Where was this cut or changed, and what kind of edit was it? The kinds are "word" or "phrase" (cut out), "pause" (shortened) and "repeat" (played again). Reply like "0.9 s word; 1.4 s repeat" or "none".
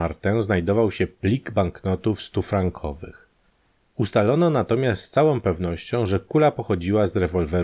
none